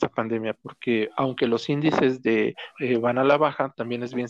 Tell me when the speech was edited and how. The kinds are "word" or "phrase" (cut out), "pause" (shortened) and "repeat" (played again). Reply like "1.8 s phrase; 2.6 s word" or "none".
2.7 s word